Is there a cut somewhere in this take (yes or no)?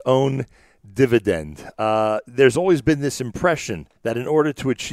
yes